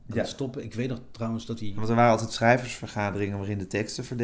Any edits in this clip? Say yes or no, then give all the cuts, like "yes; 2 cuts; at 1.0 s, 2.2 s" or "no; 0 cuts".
no; 0 cuts